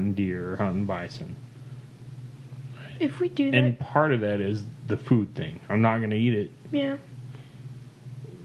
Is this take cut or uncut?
uncut